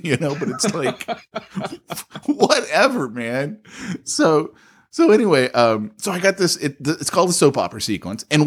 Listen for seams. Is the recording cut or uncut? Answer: uncut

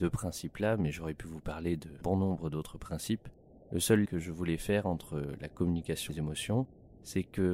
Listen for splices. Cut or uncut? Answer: cut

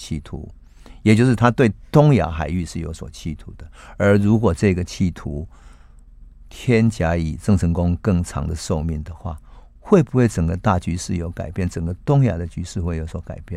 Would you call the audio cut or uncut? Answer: uncut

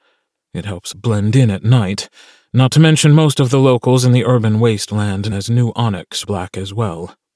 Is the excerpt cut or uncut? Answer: cut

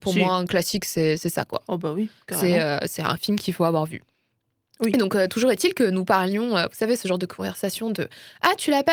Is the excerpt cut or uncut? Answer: uncut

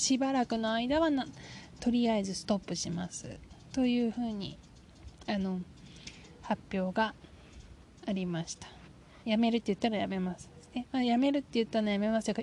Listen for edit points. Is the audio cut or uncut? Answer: cut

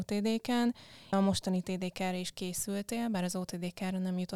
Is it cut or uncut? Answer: cut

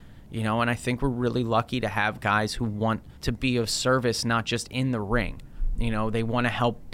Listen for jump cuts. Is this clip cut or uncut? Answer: cut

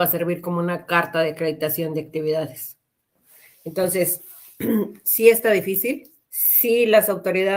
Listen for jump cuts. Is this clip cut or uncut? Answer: cut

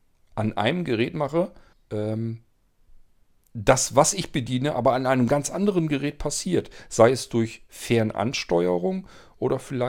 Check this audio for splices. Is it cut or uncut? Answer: cut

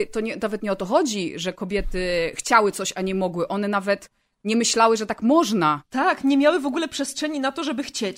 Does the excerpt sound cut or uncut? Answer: uncut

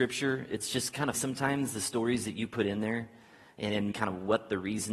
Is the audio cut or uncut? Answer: cut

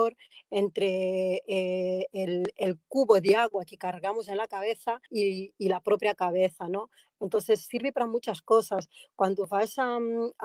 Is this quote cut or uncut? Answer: cut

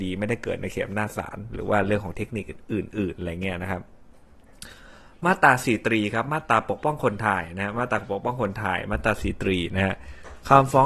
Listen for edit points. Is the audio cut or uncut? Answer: uncut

